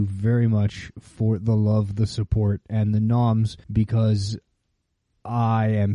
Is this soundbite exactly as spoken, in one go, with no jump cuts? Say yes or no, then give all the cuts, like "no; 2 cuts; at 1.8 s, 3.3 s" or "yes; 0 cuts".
no; 1 cut; at 3.6 s